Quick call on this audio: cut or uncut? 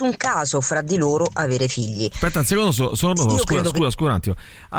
uncut